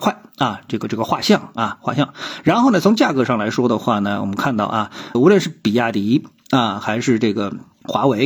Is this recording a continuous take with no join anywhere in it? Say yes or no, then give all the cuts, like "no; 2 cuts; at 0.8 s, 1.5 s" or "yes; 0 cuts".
no; 1 cut; at 5.1 s